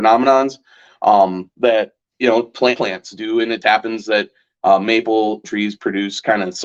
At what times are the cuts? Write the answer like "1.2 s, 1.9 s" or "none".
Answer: 2.1 s, 2.8 s, 3.6 s, 5.4 s